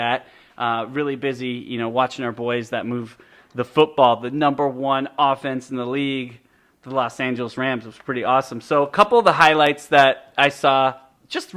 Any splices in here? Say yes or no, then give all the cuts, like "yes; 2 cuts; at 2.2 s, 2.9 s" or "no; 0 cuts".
no; 0 cuts